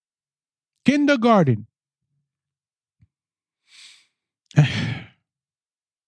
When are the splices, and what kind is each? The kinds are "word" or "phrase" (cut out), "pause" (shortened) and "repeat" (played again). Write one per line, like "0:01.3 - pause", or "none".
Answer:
none